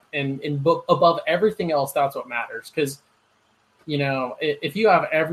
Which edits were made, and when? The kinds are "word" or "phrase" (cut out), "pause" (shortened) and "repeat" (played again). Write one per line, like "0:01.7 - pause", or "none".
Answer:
none